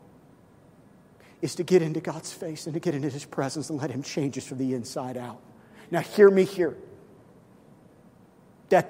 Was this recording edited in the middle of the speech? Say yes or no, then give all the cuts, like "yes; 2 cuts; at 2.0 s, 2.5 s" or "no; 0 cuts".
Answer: no; 0 cuts